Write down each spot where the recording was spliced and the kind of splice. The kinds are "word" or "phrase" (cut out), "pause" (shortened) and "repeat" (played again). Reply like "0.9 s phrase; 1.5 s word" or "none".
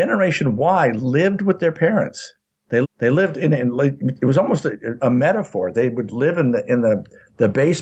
2.8 s repeat